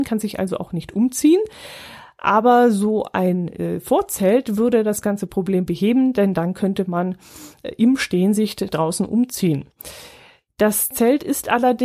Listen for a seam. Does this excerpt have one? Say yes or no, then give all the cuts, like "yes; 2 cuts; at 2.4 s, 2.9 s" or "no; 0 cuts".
no; 0 cuts